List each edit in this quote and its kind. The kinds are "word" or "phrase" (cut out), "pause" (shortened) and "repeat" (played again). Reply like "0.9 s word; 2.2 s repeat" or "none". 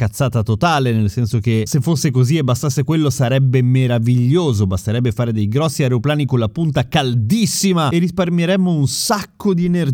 none